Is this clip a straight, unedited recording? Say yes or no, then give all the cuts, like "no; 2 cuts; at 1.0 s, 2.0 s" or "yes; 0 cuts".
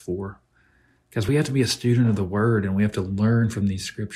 yes; 0 cuts